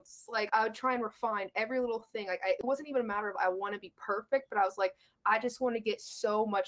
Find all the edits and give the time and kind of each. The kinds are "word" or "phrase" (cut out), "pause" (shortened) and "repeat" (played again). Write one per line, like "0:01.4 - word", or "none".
none